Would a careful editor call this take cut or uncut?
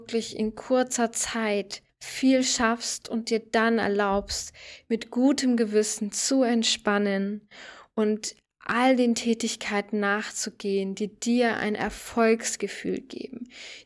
uncut